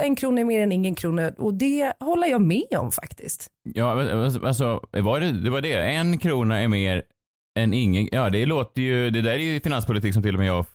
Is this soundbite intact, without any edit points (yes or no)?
yes